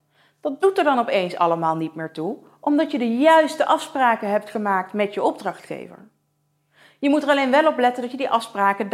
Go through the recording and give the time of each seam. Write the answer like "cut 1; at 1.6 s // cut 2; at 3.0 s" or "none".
none